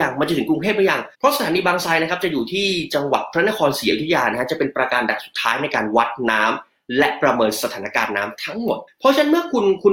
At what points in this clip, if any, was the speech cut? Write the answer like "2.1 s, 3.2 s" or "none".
1.1 s, 8.9 s